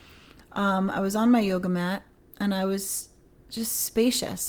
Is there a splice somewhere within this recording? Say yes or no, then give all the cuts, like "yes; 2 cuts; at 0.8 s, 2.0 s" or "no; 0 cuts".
no; 0 cuts